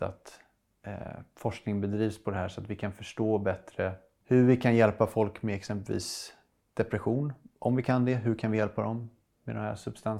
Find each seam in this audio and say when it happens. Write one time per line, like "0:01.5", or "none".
none